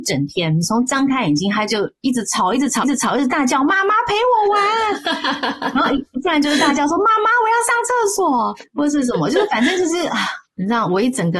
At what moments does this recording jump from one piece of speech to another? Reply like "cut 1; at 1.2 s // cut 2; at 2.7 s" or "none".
cut 1; at 2.8 s